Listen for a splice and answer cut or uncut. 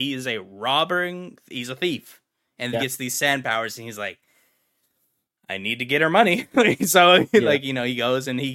cut